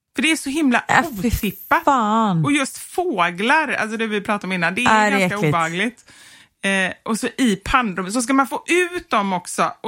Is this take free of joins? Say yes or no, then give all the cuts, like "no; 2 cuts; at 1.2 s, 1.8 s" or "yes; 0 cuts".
yes; 0 cuts